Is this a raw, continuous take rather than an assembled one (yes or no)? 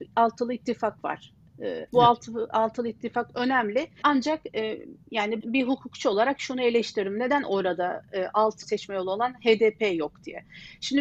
no